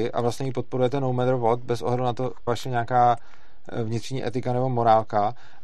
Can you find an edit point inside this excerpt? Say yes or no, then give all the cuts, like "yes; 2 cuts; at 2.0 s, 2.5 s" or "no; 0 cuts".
yes; 1 cut; at 2.5 s